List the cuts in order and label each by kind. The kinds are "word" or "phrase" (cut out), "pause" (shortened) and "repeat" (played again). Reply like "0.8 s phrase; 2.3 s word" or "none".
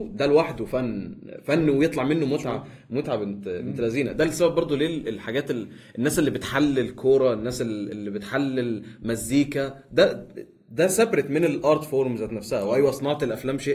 none